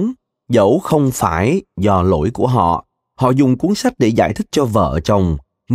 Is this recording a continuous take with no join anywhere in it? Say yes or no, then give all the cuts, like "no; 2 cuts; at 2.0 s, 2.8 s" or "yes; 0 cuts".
yes; 0 cuts